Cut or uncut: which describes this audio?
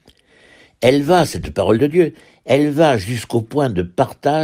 uncut